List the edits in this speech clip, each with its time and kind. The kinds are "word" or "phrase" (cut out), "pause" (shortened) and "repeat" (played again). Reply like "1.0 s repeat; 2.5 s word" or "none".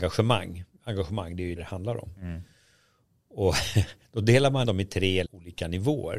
1.6 s word; 4.6 s word; 5.3 s word